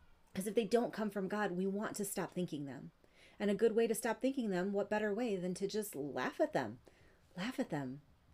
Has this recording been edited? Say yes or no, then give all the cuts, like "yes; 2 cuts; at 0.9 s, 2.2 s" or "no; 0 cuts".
no; 0 cuts